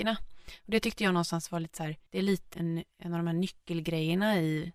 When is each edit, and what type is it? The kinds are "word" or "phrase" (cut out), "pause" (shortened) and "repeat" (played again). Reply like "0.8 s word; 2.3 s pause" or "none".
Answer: 2.1 s pause; 2.5 s word